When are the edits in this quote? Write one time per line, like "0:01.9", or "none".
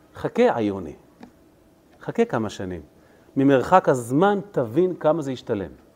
none